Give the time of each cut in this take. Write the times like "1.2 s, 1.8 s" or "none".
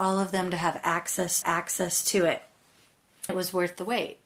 1.4 s, 3.3 s